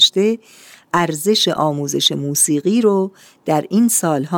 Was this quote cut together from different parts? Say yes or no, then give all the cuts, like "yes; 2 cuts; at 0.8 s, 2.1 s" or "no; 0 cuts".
no; 0 cuts